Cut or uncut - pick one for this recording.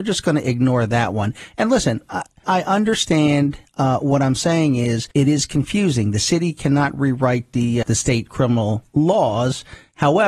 cut